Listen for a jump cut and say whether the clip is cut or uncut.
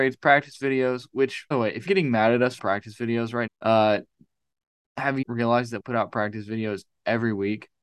cut